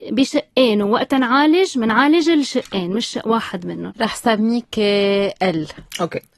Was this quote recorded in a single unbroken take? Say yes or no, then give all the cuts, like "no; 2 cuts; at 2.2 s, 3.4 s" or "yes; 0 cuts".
yes; 0 cuts